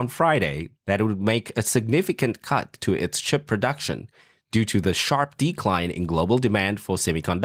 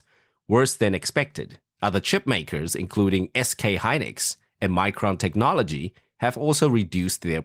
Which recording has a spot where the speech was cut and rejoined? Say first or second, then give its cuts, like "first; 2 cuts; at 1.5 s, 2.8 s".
second; 1 cut; at 1.7 s